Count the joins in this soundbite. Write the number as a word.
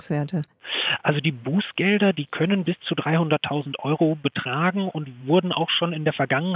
zero